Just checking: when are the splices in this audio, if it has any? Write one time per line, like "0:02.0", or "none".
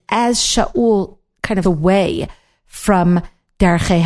0:01.6